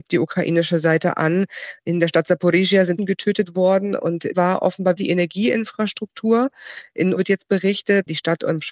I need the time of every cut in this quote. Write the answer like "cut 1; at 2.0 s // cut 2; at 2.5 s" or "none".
cut 1; at 3.0 s // cut 2; at 4.3 s // cut 3; at 5.0 s // cut 4; at 7.2 s